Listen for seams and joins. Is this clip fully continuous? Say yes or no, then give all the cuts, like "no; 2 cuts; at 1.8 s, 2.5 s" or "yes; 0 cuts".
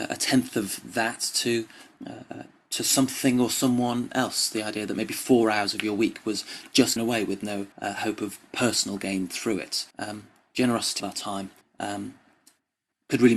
no; 6 cuts; at 2.0 s, 7.0 s, 7.7 s, 9.9 s, 11.0 s, 11.6 s